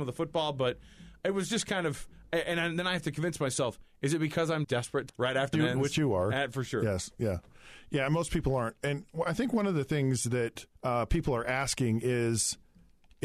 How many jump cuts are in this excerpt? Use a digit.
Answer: 4